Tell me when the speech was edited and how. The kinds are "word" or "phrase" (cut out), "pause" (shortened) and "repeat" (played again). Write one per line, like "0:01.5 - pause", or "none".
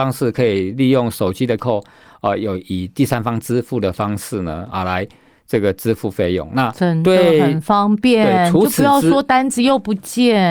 0:01.6 - word